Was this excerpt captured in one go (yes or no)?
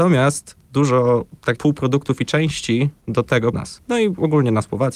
no